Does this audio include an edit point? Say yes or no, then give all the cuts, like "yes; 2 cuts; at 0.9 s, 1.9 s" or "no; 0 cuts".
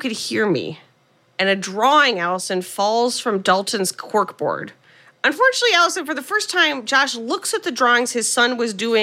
no; 0 cuts